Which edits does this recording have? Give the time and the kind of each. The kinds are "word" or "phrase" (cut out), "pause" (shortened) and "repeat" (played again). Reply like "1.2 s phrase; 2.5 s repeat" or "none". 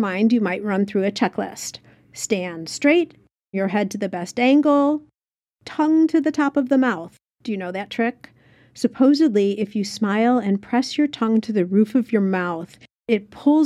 3.5 s word